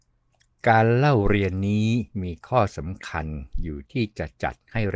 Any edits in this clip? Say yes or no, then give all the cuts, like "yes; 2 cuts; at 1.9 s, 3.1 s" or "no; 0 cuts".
yes; 1 cut; at 2.1 s